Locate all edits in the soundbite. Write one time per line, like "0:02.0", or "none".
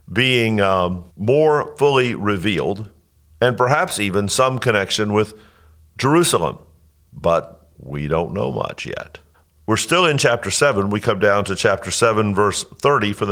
0:01.1
0:09.3